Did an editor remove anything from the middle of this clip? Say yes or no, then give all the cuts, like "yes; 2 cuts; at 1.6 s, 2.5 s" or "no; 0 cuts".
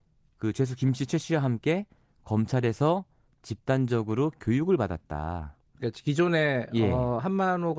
no; 0 cuts